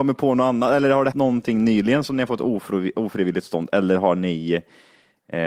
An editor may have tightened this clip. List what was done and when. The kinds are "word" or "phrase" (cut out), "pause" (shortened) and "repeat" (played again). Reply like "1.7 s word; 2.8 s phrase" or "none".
1.1 s word